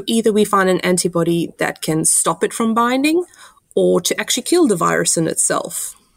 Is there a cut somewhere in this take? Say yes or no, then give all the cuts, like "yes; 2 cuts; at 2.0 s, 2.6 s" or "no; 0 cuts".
no; 0 cuts